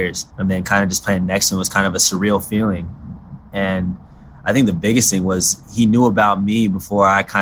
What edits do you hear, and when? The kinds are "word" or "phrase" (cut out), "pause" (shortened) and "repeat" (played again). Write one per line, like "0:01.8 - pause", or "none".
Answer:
none